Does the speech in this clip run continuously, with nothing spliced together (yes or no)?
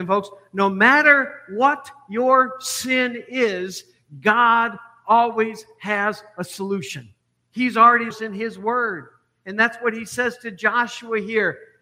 no